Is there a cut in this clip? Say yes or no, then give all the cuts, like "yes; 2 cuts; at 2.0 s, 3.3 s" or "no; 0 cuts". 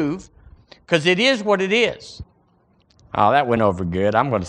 no; 0 cuts